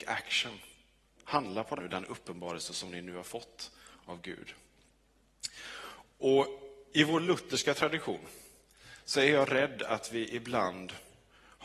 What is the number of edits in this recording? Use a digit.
1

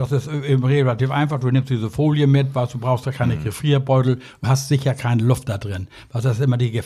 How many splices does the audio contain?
1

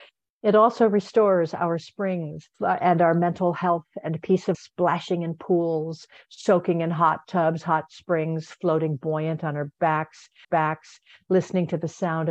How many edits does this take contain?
3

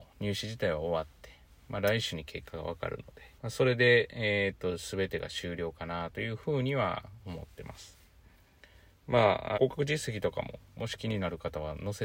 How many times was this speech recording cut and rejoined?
2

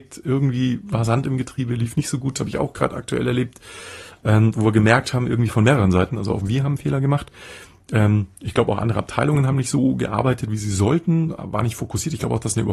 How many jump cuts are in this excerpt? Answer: 0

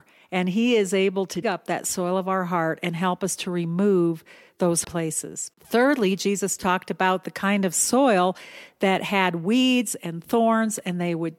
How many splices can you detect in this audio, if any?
3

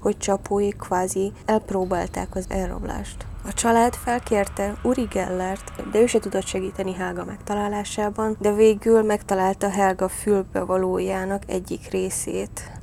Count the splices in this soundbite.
0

